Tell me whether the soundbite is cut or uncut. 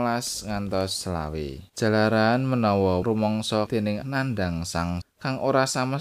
cut